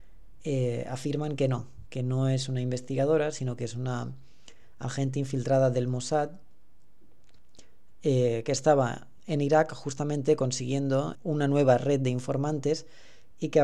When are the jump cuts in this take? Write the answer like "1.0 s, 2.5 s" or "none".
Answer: 9.2 s, 11.1 s